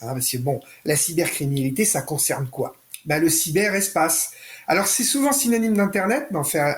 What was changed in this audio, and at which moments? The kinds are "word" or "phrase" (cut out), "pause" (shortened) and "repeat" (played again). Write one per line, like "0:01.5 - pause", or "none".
none